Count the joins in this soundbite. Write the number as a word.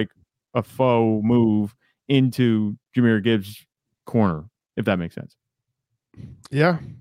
zero